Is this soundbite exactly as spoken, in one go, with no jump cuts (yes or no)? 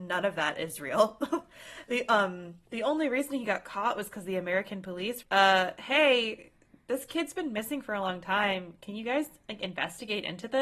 no